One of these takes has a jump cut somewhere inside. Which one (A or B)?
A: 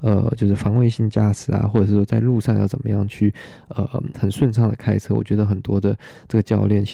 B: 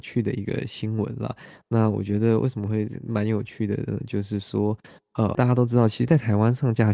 B